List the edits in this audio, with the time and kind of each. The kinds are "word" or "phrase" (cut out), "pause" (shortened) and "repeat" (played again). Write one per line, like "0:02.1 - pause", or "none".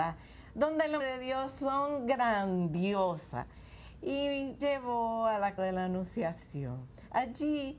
0:01.0 - word
0:04.6 - word
0:05.6 - word